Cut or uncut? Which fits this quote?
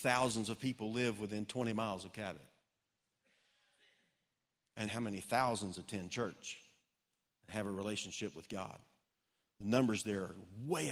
cut